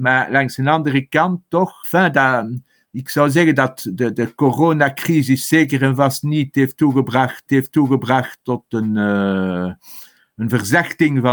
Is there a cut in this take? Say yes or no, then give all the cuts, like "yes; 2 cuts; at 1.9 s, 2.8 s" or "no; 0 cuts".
yes; 2 cuts; at 1.8 s, 7.5 s